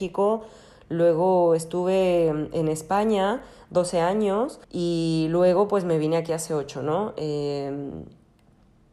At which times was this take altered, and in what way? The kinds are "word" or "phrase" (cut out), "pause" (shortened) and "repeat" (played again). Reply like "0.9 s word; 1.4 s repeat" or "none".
4.6 s pause